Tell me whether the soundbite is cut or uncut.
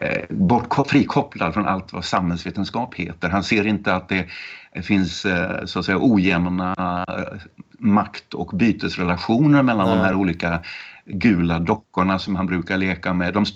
uncut